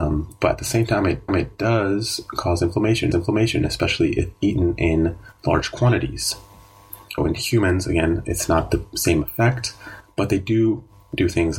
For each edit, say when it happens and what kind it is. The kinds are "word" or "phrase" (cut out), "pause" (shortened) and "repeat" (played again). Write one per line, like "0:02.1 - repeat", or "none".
0:01.3 - repeat
0:03.1 - repeat
0:07.2 - word